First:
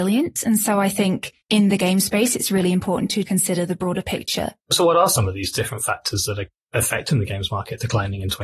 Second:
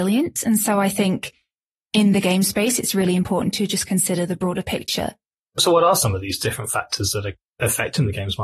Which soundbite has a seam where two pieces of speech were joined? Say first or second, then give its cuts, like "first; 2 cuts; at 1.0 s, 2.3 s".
first; 3 cuts; at 1.4 s, 3.2 s, 4.6 s